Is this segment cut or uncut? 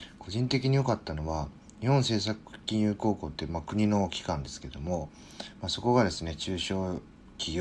uncut